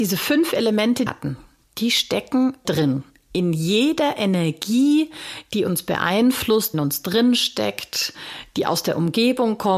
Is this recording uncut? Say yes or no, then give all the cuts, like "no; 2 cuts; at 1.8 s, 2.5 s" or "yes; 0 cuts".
no; 3 cuts; at 1.1 s, 2.6 s, 6.7 s